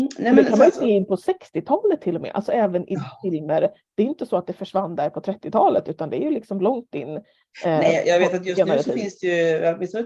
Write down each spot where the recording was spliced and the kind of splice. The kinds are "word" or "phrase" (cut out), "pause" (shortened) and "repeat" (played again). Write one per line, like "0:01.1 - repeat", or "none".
none